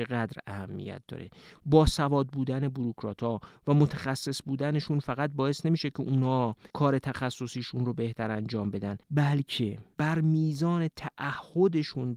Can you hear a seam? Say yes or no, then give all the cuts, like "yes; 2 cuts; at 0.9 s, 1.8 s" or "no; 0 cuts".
yes; 2 cuts; at 6.7 s, 9.0 s